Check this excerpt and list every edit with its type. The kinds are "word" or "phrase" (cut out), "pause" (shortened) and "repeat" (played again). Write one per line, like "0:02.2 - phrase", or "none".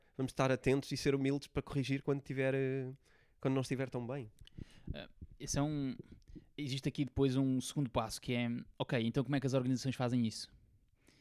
none